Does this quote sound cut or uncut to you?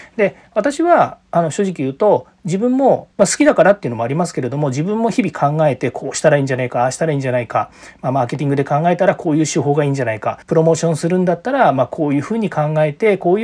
cut